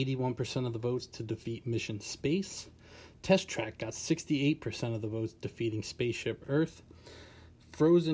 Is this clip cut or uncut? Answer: uncut